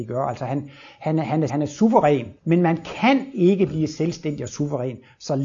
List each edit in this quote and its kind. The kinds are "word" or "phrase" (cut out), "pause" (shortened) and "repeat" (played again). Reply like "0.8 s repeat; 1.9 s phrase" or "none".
1.5 s word; 2.4 s pause